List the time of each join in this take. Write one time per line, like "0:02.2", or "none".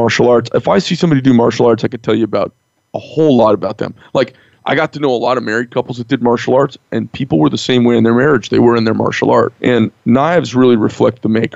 0:09.6